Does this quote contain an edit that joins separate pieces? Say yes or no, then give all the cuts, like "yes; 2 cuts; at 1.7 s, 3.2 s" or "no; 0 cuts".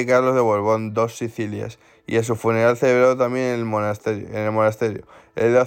no; 0 cuts